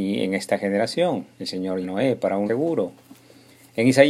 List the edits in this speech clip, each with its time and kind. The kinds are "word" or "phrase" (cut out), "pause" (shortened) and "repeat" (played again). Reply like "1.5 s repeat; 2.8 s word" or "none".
1.3 s pause; 1.8 s word; 2.5 s word

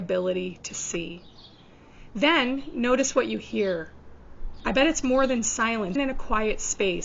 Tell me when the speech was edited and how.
5.9 s word

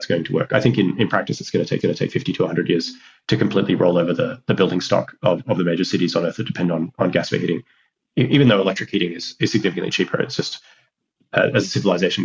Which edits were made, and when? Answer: 1.8 s repeat

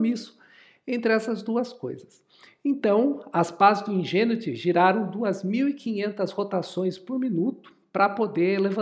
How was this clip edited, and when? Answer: none

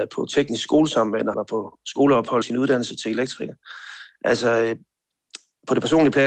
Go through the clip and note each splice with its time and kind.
1.3 s word; 2.4 s word

